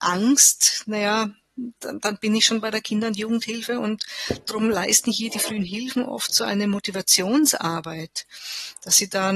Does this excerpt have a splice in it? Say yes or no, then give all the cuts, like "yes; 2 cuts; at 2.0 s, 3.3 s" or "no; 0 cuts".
no; 0 cuts